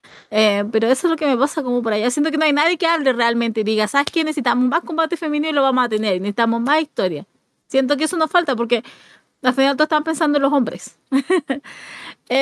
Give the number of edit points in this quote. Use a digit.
0